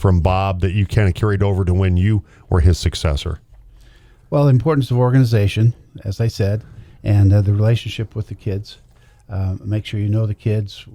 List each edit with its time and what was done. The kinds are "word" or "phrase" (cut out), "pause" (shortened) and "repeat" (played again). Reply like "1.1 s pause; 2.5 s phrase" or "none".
none